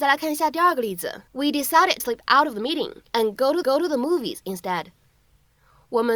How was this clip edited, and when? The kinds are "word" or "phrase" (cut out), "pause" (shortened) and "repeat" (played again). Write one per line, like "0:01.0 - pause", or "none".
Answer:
0:01.3 - pause
0:02.0 - word
0:03.1 - pause
0:03.6 - repeat